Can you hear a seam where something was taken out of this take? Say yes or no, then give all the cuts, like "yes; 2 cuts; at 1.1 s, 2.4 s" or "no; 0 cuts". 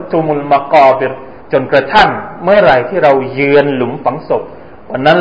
yes; 1 cut; at 1.4 s